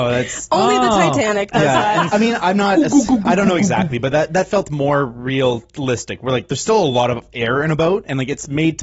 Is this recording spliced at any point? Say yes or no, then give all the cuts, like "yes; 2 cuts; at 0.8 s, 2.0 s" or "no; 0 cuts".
yes; 1 cut; at 2.1 s